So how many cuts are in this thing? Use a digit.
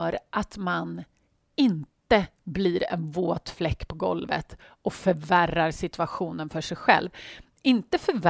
0